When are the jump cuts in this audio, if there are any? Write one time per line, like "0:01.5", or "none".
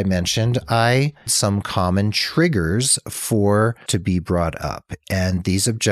0:01.3
0:03.9